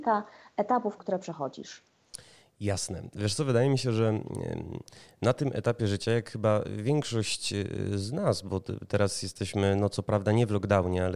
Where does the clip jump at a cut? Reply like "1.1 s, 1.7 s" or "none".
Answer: 1.0 s